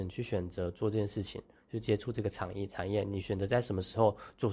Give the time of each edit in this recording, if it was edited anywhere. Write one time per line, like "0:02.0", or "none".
none